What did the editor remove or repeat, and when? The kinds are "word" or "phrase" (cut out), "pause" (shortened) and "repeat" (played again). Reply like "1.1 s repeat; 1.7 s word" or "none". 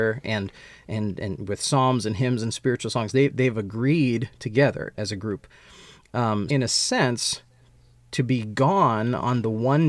4.9 s word; 6.5 s word